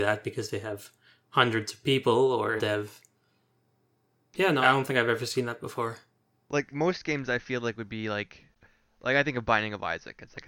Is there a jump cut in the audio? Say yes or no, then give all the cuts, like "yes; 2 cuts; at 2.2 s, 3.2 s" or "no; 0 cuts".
yes; 3 cuts; at 2.6 s, 4.6 s, 6.7 s